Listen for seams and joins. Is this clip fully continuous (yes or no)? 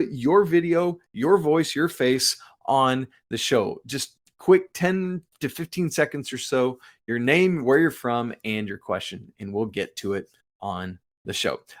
yes